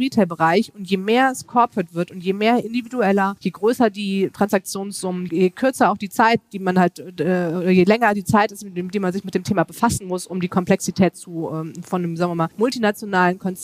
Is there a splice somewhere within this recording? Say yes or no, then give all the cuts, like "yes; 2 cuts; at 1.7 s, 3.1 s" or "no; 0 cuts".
yes; 1 cut; at 12.5 s